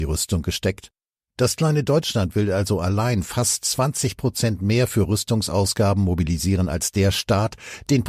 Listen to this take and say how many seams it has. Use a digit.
0